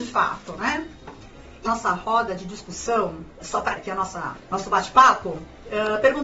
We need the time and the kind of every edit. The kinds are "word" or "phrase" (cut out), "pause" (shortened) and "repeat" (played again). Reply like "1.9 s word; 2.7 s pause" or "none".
1.7 s phrase; 3.4 s word; 3.8 s word; 4.4 s pause